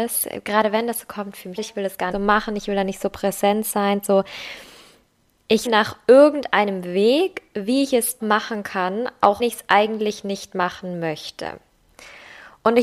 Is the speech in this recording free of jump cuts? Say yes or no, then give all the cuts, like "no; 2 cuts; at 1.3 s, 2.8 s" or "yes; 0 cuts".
no; 5 cuts; at 1.6 s, 2.1 s, 5.7 s, 8.2 s, 9.4 s